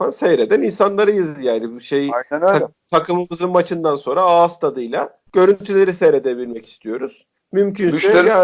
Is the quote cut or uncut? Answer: cut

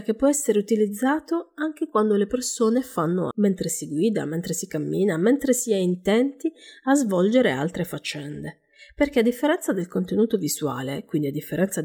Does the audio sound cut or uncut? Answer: cut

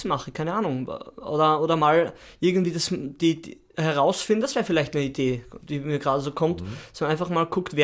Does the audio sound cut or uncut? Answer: uncut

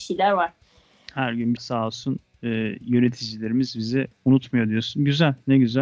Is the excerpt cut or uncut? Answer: cut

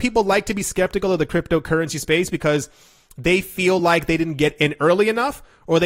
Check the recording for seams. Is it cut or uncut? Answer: uncut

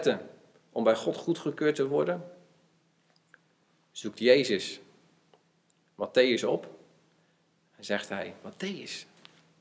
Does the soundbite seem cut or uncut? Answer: uncut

